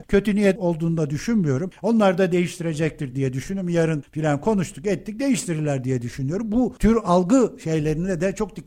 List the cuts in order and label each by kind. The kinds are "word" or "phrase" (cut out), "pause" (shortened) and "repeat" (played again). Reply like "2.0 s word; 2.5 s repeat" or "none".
none